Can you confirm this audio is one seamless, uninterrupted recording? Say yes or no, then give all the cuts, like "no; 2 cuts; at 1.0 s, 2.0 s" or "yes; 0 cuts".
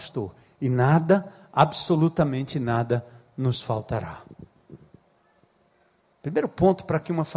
yes; 0 cuts